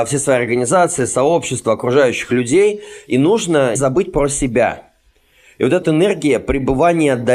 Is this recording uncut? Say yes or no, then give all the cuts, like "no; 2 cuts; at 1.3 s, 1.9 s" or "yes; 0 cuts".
no; 2 cuts; at 3.8 s, 5.8 s